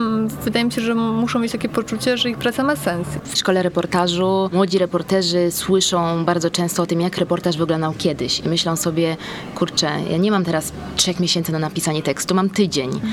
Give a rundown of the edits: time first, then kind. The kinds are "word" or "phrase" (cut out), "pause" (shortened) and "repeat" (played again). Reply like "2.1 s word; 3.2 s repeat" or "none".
3.3 s word

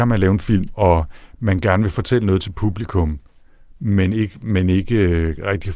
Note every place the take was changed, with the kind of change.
none

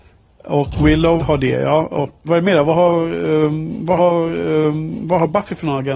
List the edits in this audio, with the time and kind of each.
1.2 s word; 2.2 s word; 4.0 s repeat

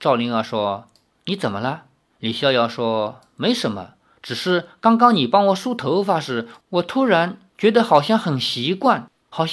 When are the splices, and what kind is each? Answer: 2.1 s pause; 7.5 s pause

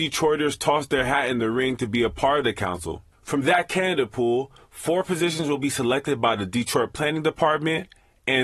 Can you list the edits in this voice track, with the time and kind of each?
none

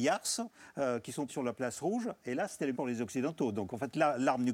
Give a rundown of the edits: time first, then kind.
1.3 s word; 2.7 s word

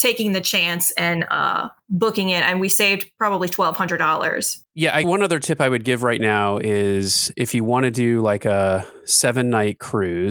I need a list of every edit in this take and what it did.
5.0 s word

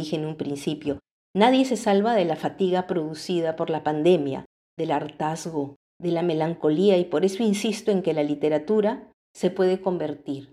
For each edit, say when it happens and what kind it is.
none

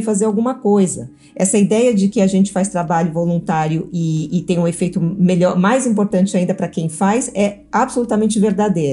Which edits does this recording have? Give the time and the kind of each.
none

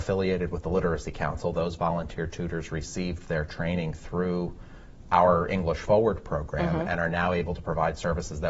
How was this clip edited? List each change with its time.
none

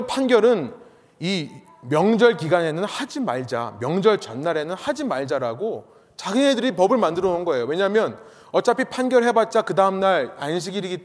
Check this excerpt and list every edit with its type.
none

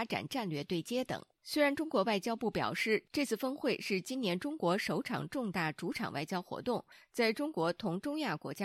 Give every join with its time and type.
1.3 s pause

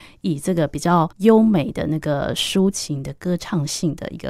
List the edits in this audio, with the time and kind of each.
1.1 s pause

